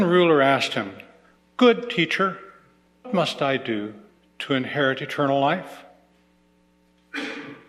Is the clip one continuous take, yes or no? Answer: no